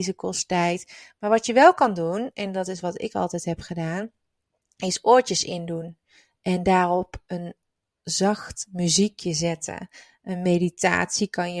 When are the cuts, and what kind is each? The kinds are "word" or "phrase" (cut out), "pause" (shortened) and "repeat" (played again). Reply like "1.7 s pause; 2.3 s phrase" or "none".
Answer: none